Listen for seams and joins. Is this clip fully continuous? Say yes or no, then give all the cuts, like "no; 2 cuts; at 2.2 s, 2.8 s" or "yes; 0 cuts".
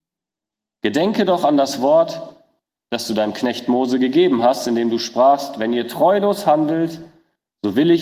yes; 0 cuts